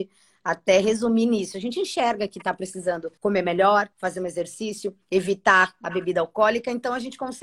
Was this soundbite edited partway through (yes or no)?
yes